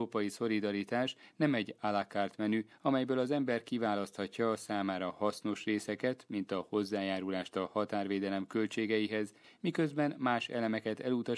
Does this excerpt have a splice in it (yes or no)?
no